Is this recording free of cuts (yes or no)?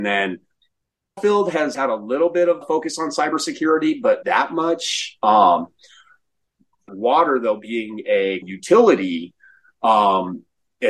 no